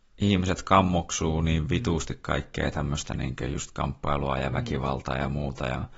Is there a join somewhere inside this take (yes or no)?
no